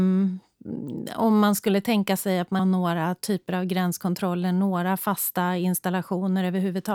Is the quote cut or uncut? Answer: cut